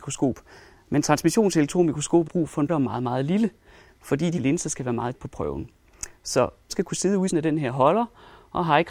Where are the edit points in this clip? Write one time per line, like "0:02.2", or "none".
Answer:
0:02.3
0:02.7
0:04.4
0:05.1
0:06.7
0:07.3